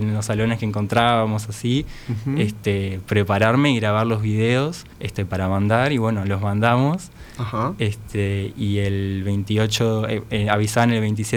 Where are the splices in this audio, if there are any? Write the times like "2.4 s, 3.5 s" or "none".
4.9 s

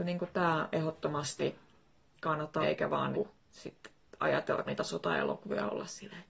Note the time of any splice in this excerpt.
2.6 s, 3.1 s, 4.7 s

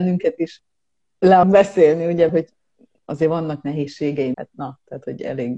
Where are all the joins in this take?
1.4 s, 2.3 s, 4.3 s

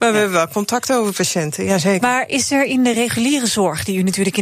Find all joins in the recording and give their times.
none

